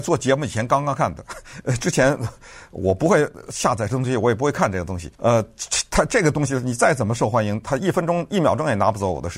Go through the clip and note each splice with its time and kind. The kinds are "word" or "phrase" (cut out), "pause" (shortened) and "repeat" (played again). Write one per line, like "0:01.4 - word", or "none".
0:05.1 - pause